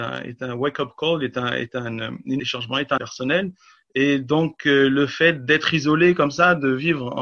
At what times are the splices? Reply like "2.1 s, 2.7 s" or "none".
2.4 s, 3.0 s